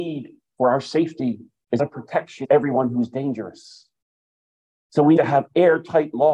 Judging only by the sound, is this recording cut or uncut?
cut